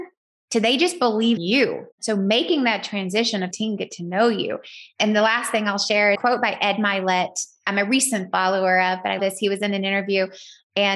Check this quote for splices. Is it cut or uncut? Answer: cut